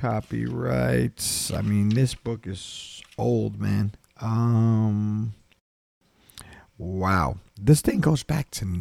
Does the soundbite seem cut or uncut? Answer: uncut